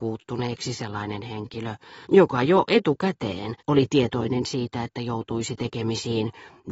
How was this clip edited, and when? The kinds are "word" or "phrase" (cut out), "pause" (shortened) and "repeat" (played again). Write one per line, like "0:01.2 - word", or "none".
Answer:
0:02.0 - pause
0:03.6 - pause